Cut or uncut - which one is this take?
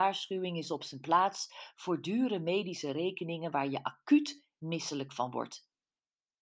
uncut